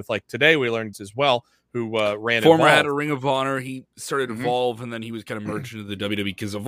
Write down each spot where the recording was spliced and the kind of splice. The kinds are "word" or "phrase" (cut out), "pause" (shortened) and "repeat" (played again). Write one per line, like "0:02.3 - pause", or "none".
0:00.9 - phrase